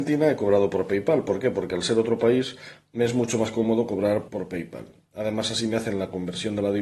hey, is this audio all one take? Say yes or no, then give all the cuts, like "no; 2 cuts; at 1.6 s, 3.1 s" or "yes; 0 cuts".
no; 1 cut; at 4.3 s